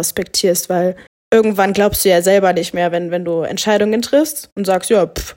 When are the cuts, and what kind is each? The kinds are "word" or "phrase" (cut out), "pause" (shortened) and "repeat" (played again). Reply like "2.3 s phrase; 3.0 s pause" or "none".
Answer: 1.1 s pause